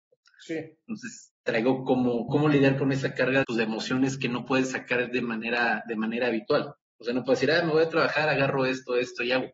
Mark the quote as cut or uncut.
cut